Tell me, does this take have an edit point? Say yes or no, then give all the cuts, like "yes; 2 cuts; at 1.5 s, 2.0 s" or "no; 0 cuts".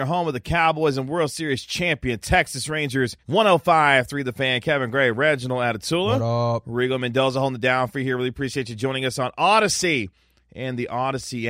yes; 1 cut; at 3.2 s